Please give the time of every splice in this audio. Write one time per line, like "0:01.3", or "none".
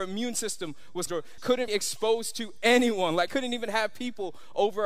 0:01.1
0:01.4
0:01.7
0:03.3